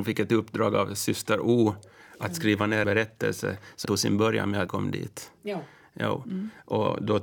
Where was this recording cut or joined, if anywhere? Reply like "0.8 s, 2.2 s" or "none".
2.8 s, 3.9 s, 4.7 s